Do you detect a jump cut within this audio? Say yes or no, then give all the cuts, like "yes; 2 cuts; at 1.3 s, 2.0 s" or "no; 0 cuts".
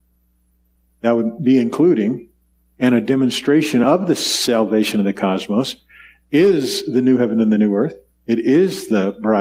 no; 0 cuts